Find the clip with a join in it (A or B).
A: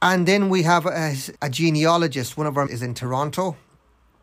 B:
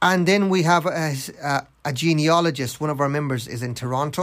A